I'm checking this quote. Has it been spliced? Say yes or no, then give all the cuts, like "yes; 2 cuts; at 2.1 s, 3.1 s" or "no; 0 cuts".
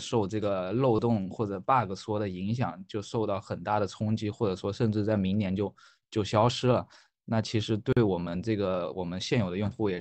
no; 0 cuts